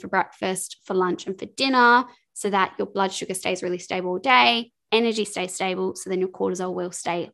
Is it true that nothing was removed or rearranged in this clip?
yes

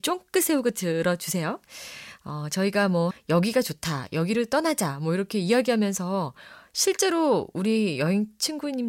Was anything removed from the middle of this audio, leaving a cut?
yes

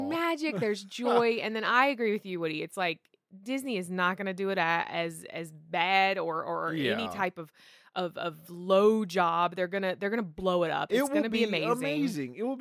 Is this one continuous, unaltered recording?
yes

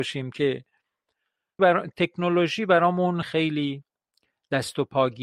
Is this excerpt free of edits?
no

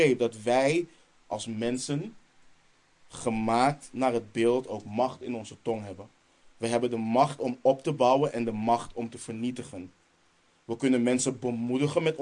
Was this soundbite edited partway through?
no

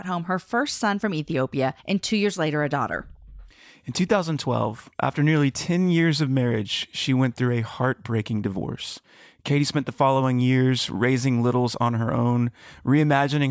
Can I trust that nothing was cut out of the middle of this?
no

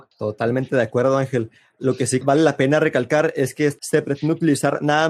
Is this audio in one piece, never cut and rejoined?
no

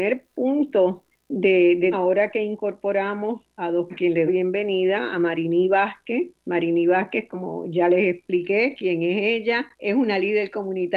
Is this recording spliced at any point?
yes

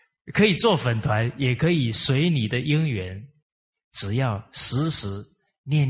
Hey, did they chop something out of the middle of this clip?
no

